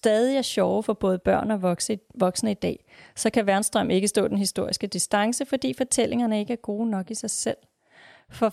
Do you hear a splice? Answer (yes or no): no